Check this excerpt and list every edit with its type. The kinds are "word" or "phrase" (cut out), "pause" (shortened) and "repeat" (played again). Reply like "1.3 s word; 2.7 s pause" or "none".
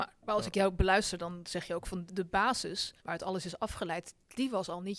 2.1 s word; 3.0 s pause